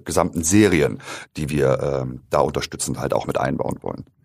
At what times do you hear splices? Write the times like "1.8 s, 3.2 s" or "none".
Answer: none